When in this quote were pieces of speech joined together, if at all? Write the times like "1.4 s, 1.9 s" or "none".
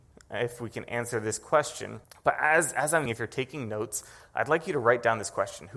2.0 s, 3.1 s